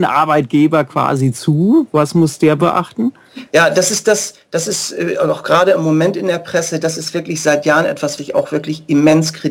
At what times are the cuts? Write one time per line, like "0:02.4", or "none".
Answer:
0:08.2